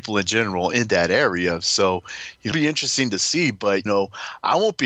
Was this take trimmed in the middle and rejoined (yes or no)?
yes